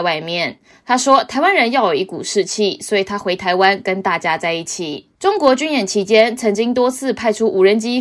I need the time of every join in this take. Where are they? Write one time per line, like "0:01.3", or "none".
0:05.1